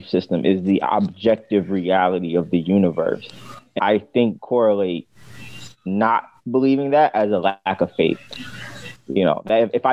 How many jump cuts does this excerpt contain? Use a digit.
3